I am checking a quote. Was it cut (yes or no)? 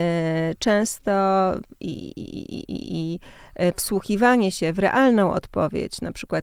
no